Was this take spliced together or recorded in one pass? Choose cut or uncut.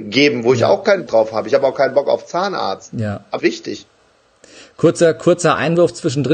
cut